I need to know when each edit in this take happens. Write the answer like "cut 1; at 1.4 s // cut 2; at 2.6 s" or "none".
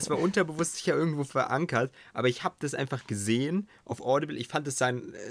none